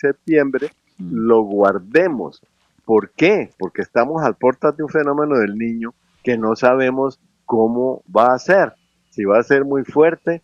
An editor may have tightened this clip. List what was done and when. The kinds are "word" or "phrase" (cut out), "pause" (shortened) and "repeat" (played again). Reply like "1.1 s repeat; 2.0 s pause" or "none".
none